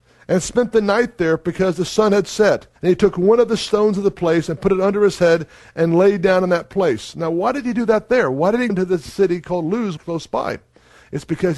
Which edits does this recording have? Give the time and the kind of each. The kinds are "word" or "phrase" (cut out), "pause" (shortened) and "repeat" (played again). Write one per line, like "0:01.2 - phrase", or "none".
0:02.8 - pause
0:08.7 - word
0:10.0 - phrase